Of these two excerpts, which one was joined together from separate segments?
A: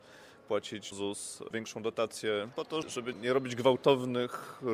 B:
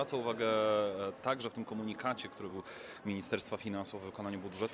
A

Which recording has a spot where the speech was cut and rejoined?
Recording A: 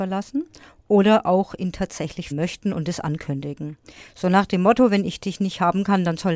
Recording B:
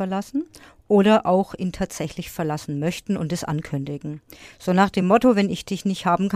A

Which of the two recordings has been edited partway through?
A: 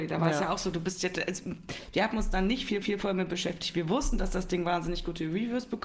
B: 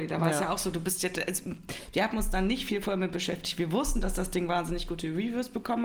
A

